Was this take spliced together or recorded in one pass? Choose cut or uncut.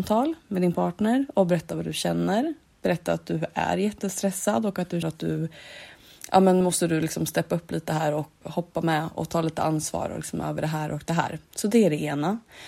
cut